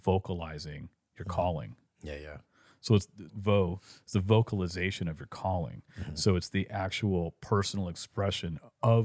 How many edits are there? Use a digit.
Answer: 1